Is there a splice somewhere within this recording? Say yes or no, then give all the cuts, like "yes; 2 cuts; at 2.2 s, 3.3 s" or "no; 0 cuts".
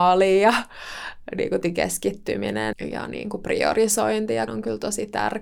yes; 3 cuts; at 1.6 s, 2.7 s, 4.5 s